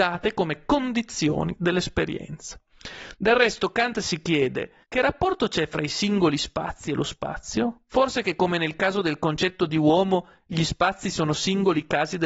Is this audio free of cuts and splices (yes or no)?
no